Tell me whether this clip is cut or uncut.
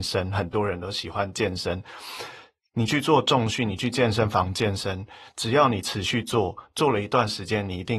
uncut